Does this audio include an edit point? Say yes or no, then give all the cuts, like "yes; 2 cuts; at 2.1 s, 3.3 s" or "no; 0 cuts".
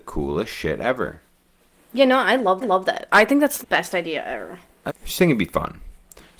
yes; 4 cuts; at 1.7 s, 2.6 s, 3.6 s, 4.9 s